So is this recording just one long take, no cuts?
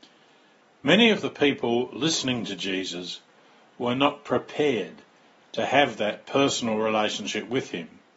yes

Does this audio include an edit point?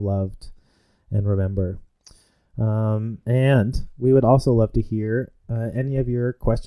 no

